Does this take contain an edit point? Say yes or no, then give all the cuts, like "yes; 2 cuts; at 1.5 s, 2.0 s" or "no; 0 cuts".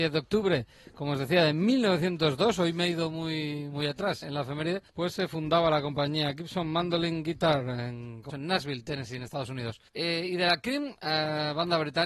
yes; 4 cuts; at 4.2 s, 4.9 s, 8.3 s, 9.9 s